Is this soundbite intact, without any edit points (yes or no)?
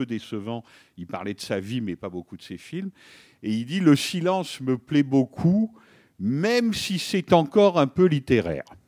yes